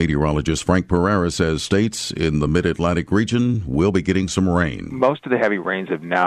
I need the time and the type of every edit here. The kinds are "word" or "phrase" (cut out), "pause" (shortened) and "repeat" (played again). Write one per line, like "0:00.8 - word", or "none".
none